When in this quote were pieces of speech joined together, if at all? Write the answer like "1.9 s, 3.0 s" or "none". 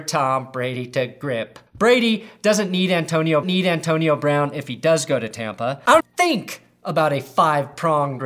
1.7 s, 3.4 s, 6.0 s